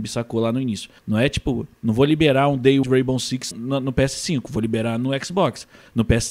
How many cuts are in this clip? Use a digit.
3